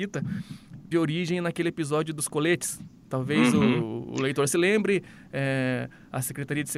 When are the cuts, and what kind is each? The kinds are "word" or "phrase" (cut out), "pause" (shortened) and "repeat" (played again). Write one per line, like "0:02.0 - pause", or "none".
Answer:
0:00.9 - word